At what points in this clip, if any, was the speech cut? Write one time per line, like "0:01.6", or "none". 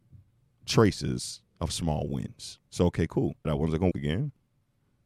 0:01.5
0:02.7
0:03.4
0:03.9